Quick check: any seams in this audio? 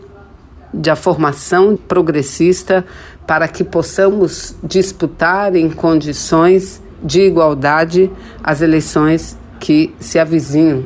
yes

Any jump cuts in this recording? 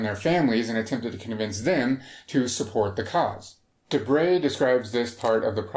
no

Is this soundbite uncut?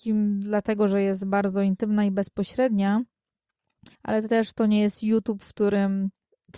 no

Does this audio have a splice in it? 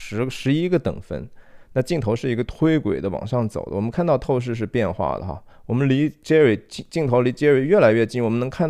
no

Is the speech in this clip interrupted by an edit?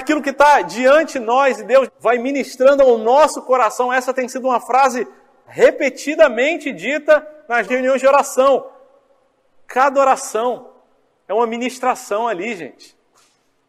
yes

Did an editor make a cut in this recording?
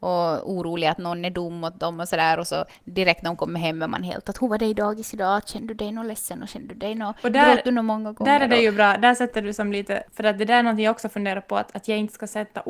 yes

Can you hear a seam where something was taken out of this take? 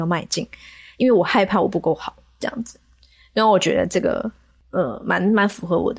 no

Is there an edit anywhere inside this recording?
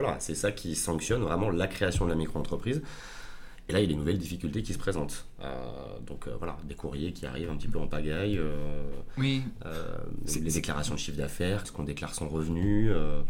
yes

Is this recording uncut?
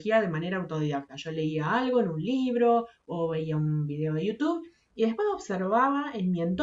yes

